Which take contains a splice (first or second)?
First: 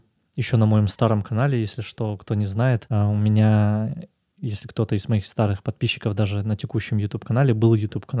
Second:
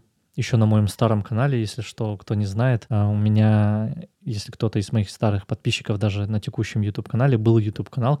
second